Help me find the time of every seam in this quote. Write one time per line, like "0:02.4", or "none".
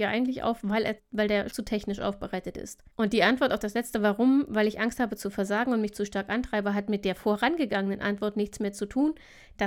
0:01.0
0:01.5
0:02.9
0:05.9